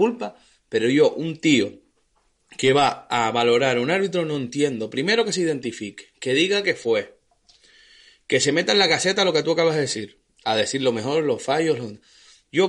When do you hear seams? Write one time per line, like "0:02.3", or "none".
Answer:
none